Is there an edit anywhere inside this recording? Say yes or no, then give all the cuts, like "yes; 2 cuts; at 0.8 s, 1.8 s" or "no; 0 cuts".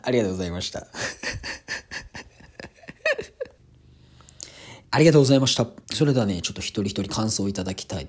yes; 2 cuts; at 4.8 s, 5.8 s